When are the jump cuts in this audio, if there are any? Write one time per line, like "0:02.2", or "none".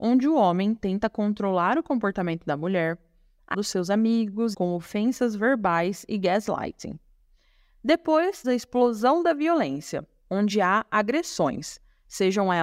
0:03.5
0:04.5
0:08.4